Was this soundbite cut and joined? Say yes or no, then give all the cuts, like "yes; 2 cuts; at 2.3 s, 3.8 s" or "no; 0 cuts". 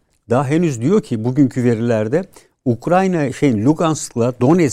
no; 0 cuts